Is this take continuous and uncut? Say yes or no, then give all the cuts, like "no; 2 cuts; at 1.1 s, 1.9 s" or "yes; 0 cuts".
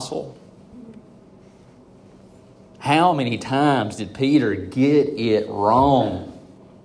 yes; 0 cuts